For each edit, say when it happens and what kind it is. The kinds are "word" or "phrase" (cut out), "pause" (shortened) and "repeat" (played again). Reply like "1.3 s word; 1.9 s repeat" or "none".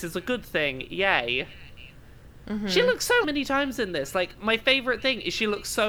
3.2 s phrase